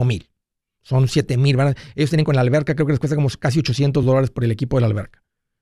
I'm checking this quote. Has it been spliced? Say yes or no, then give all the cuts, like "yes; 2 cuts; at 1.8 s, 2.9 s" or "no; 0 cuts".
no; 0 cuts